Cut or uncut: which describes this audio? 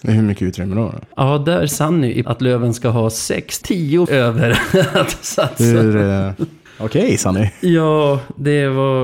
cut